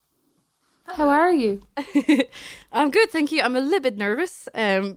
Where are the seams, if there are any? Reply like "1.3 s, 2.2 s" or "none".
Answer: none